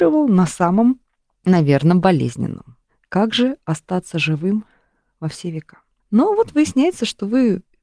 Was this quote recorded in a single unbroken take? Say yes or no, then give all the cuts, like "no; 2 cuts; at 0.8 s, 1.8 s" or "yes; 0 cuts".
yes; 0 cuts